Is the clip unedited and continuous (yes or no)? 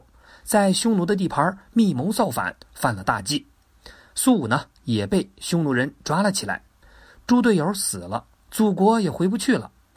yes